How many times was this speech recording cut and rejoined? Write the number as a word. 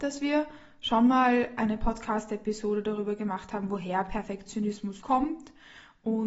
one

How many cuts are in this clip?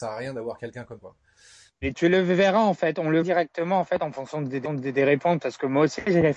three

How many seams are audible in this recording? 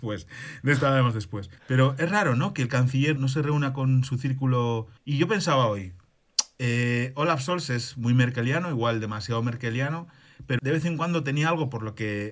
four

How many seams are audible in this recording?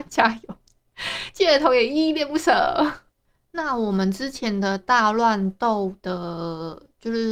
zero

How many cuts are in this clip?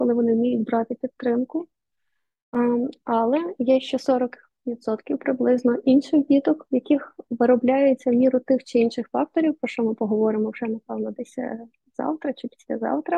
zero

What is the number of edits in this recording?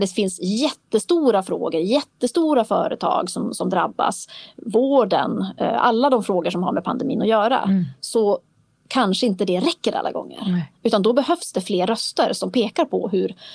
zero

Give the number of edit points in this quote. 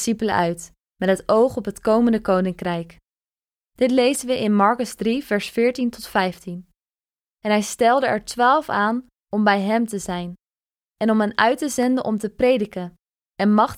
zero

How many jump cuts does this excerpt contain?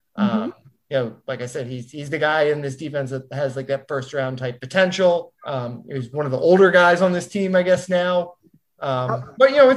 one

